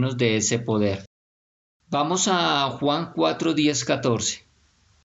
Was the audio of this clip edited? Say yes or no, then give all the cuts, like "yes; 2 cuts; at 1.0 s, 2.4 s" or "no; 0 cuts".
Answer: no; 0 cuts